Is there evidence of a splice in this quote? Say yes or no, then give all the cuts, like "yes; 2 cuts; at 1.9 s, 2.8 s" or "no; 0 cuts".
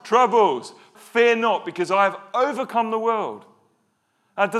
yes; 1 cut; at 0.9 s